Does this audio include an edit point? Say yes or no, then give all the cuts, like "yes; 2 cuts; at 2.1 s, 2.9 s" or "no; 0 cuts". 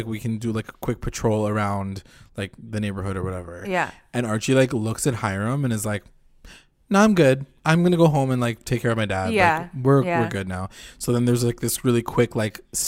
no; 0 cuts